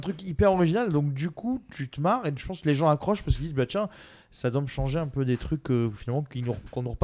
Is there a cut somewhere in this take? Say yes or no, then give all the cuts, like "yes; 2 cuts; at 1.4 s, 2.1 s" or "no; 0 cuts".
no; 0 cuts